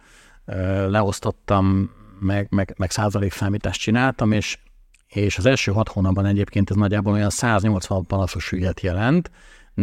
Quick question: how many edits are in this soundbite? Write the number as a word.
zero